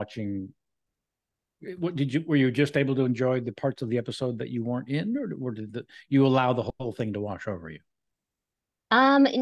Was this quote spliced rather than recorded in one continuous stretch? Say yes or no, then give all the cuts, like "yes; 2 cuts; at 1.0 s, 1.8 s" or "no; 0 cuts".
no; 0 cuts